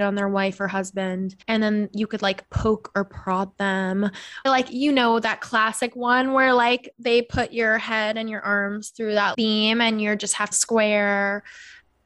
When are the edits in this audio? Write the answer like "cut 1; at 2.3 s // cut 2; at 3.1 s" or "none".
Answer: cut 1; at 1.4 s // cut 2; at 4.5 s // cut 3; at 9.3 s // cut 4; at 10.5 s